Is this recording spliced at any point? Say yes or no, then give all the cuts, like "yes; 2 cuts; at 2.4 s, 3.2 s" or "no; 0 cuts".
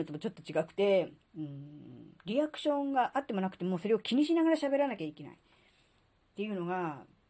yes; 2 cuts; at 1.2 s, 2.2 s